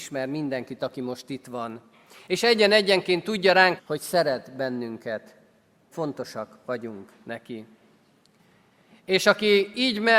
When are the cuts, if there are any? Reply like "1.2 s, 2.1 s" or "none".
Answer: 3.8 s, 5.9 s